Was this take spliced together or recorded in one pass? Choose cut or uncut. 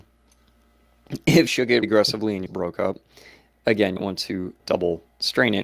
cut